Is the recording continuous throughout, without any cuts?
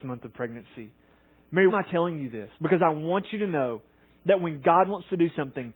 no; 2 cuts; at 1.7 s, 2.5 s

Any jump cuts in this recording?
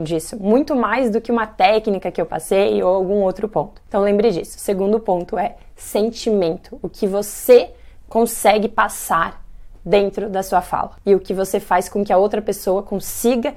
no; 0 cuts

